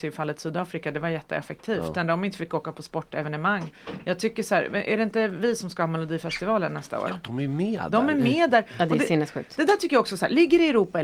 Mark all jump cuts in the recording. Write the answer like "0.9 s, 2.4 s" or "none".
none